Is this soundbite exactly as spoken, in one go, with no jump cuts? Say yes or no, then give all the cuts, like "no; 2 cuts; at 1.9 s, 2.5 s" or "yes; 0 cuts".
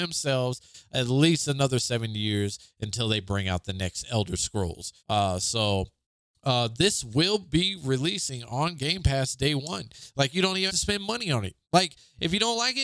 no; 4 cuts; at 5.0 s, 6.0 s, 10.7 s, 11.6 s